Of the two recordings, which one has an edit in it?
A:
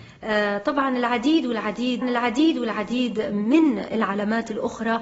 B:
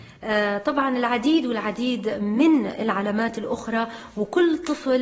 A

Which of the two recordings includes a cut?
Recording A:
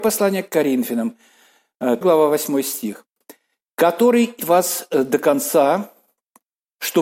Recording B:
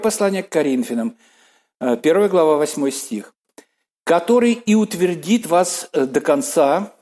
A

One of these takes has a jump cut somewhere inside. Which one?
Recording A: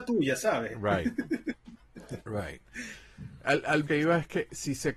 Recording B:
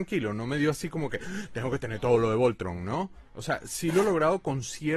A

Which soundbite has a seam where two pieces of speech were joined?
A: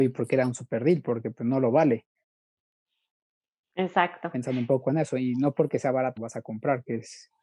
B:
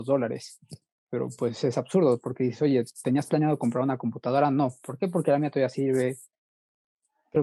A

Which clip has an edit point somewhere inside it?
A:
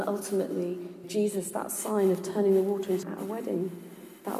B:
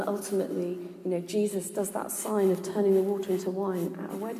A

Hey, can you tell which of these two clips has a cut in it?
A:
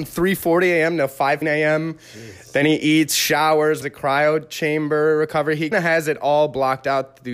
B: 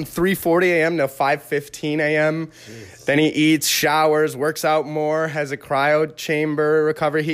A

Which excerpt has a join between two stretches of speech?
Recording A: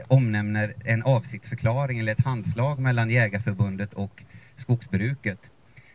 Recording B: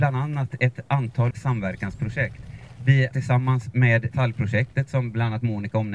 B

